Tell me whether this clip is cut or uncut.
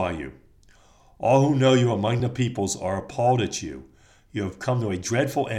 uncut